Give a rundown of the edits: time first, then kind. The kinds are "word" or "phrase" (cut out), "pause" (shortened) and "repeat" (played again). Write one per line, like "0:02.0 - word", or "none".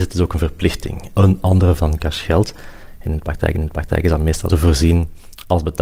0:01.8 - word
0:03.5 - repeat
0:04.5 - phrase